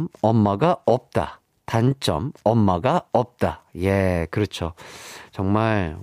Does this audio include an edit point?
no; 0 cuts

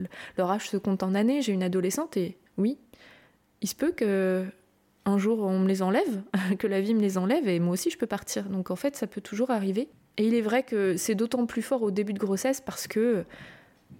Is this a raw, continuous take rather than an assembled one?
no; 1 cut; at 2.5 s

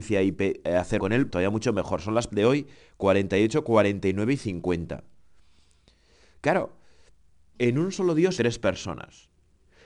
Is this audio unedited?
no; 5 cuts; at 1.0 s, 1.3 s, 2.3 s, 7.6 s, 8.4 s

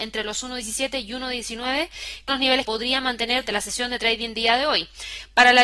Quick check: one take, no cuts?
no; 4 cuts; at 2.3 s, 2.6 s, 3.4 s, 4.3 s

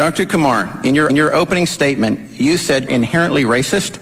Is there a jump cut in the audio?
yes; 2 cuts; at 1.1 s, 2.9 s

